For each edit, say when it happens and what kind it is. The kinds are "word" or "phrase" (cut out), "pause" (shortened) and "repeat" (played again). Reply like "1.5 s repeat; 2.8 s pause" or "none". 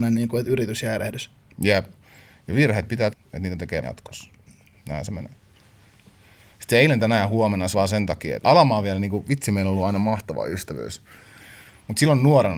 3.1 s word; 3.8 s word; 7.7 s word; 8.4 s word